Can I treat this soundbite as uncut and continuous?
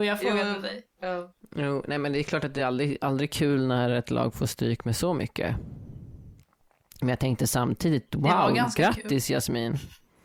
yes; 0 cuts

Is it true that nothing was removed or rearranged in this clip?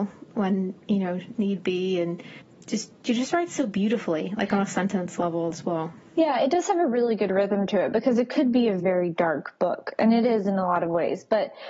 no; 1 cut; at 8.8 s

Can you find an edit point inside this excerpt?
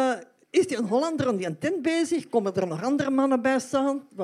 no; 0 cuts

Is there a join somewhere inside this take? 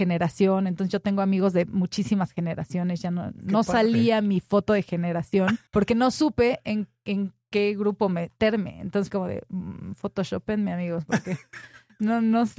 yes; 2 cuts; at 5.7 s, 9.1 s

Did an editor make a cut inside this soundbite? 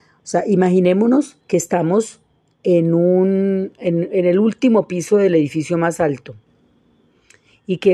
yes; 1 cut; at 1.4 s

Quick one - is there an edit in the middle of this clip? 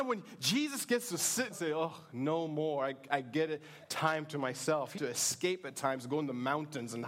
yes; 2 cuts; at 1.5 s, 5.0 s

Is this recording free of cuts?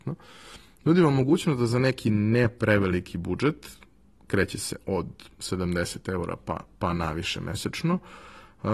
yes; 0 cuts

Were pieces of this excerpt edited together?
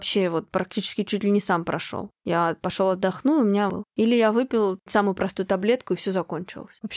yes; 2 cuts; at 3.7 s, 4.9 s

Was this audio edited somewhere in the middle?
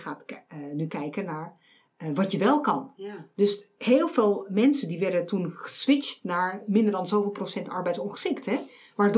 no; 0 cuts

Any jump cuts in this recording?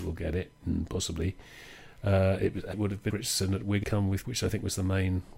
yes; 4 cuts; at 2.7 s, 3.1 s, 3.8 s, 4.2 s

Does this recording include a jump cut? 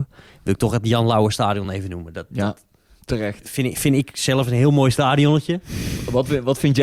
no; 0 cuts

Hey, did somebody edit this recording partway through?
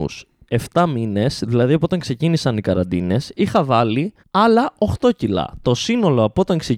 yes; 1 cut; at 4.2 s

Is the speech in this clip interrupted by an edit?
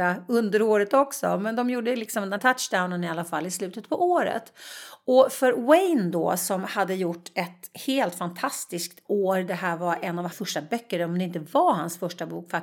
yes; 2 cuts; at 2.4 s, 10.3 s

